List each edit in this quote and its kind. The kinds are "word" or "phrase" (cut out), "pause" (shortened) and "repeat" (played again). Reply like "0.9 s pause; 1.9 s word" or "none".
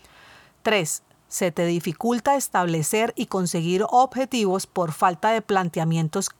none